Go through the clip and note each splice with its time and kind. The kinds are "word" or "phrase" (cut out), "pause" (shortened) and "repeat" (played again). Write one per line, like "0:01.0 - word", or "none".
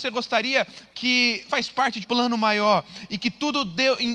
0:00.9 - word
0:01.5 - word
0:02.0 - word